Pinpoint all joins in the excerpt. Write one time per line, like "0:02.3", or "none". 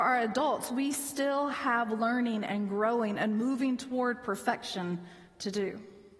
none